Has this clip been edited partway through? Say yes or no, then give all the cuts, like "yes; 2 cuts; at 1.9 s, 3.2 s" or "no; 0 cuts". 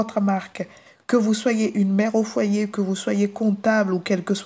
no; 0 cuts